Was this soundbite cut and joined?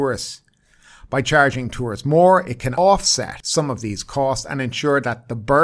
no; 0 cuts

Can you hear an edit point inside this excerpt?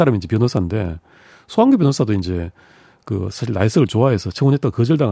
no; 0 cuts

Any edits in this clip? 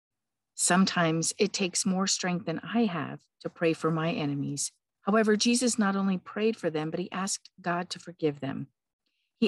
yes; 1 cut; at 4.9 s

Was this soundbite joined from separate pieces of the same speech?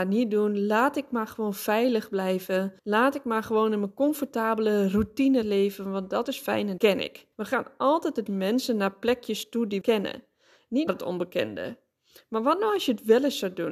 yes; 8 cuts; at 2.8 s, 5.4 s, 6.2 s, 6.8 s, 7.3 s, 8.3 s, 9.8 s, 10.9 s

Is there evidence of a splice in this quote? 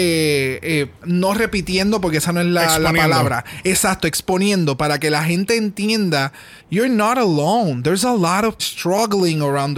yes; 3 cuts; at 1.0 s, 6.6 s, 8.6 s

